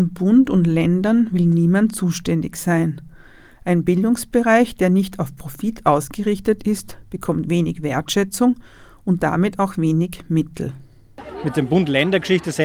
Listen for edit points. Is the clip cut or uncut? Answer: uncut